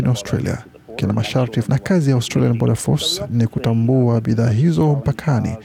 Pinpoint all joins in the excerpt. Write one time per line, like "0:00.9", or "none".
0:01.6